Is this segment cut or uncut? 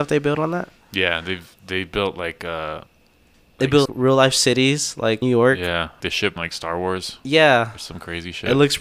cut